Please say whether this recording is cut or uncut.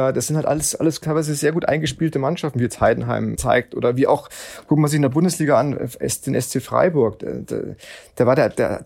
cut